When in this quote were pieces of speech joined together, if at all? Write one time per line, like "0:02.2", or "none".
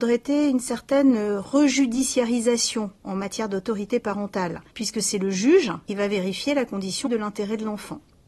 0:04.7
0:05.9
0:07.1